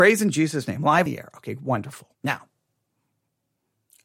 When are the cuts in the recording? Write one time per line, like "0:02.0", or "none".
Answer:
0:01.1
0:02.1